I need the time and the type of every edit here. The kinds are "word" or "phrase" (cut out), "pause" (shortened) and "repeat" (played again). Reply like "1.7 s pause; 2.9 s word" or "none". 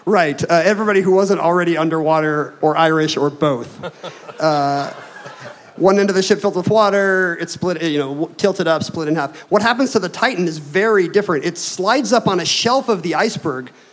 none